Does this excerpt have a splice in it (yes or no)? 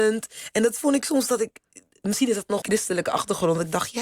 yes